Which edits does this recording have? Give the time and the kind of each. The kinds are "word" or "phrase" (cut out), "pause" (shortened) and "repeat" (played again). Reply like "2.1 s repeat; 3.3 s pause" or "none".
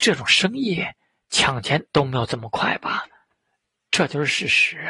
1.9 s pause